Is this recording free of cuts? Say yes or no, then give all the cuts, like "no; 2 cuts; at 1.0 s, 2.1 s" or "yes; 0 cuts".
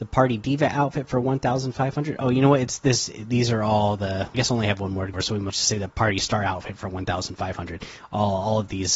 no; 3 cuts; at 4.3 s, 5.1 s, 5.5 s